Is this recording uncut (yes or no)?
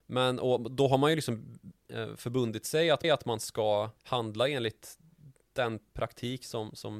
no